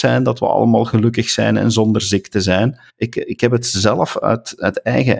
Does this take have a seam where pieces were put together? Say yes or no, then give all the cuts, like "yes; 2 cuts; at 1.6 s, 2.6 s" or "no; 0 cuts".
yes; 1 cut; at 2.9 s